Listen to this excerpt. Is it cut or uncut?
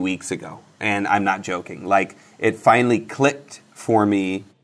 uncut